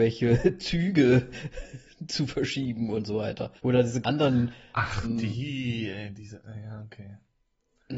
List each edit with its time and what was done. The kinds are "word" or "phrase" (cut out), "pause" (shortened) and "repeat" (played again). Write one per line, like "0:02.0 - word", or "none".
0:03.6 - pause
0:04.0 - word
0:05.0 - word

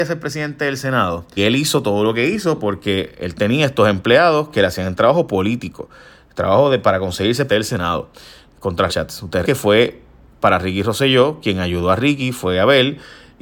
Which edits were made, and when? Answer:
0:01.4 - word
0:07.5 - word
0:08.9 - word
0:09.4 - word

